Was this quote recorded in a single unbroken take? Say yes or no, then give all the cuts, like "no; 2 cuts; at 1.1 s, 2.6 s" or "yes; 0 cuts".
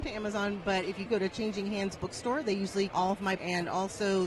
no; 3 cuts; at 1.1 s, 2.9 s, 3.4 s